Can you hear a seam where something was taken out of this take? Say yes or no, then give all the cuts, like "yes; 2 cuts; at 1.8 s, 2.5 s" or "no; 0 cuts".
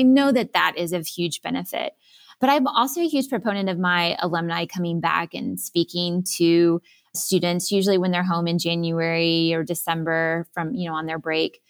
no; 0 cuts